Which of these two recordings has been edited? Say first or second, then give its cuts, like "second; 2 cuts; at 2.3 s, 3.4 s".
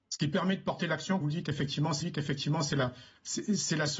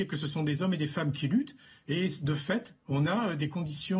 first; 2 cuts; at 1.2 s, 2.0 s